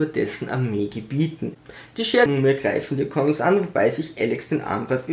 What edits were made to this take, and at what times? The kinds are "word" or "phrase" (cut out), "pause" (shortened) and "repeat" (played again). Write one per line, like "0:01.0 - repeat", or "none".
0:02.3 - word

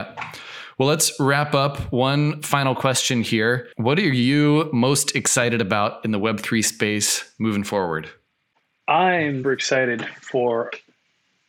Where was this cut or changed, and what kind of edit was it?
0:03.7 - pause
0:09.4 - word

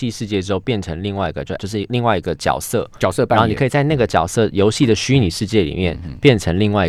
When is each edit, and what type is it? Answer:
0:01.6 - word

